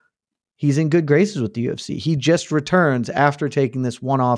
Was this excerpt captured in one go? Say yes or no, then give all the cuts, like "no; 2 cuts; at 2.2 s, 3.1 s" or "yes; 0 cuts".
yes; 0 cuts